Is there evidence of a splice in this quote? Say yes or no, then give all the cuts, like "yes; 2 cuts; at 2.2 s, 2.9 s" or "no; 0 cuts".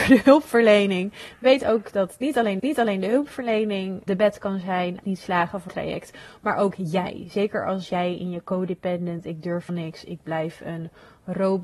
yes; 5 cuts; at 2.6 s, 4.1 s, 5.0 s, 5.7 s, 9.7 s